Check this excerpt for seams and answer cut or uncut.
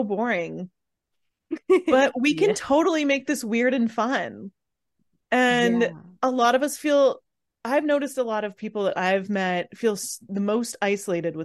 uncut